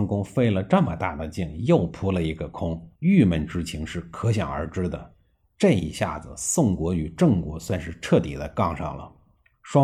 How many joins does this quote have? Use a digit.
1